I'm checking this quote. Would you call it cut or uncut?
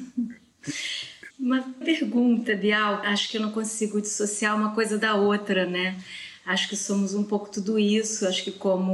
cut